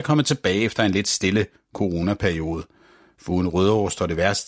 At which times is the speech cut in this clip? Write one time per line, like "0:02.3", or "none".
none

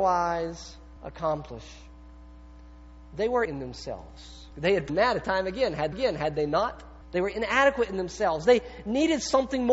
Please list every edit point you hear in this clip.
0:01.0
0:03.5
0:04.5
0:04.9
0:05.2
0:05.9
0:07.0

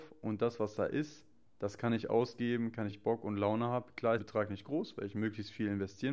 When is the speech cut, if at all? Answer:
0:02.9
0:04.2

